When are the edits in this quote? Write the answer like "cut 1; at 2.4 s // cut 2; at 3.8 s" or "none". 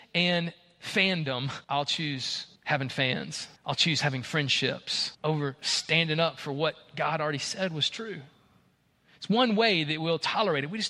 cut 1; at 1.6 s // cut 2; at 2.6 s // cut 3; at 3.6 s // cut 4; at 5.1 s